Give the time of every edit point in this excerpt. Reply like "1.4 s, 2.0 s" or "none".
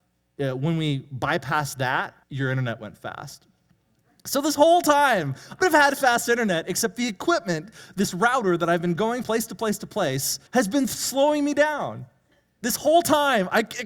2.2 s, 5.6 s, 9.2 s, 10.5 s